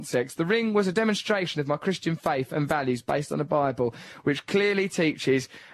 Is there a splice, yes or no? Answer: no